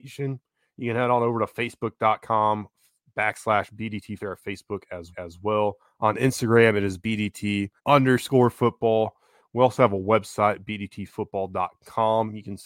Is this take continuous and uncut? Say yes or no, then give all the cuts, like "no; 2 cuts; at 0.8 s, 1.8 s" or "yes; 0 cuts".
no; 3 cuts; at 4.2 s, 5.1 s, 7.8 s